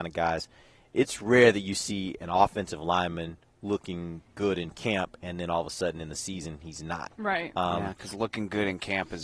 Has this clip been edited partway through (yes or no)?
no